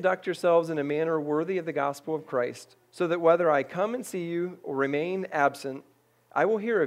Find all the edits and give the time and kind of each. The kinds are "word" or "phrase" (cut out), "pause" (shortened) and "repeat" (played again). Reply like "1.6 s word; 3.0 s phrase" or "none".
2.8 s pause